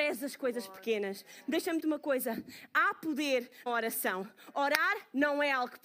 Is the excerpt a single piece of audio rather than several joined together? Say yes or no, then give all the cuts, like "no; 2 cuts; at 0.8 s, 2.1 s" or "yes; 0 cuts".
no; 2 cuts; at 1.8 s, 3.7 s